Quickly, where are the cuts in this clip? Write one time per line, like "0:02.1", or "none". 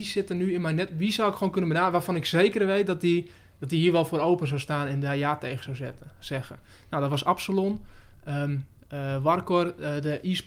none